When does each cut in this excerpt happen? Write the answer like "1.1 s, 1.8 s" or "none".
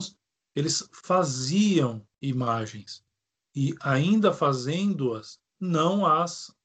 2.1 s, 5.5 s